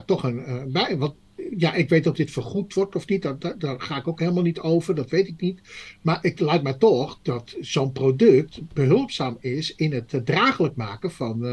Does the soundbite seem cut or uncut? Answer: cut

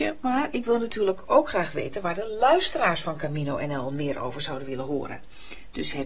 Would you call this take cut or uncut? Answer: uncut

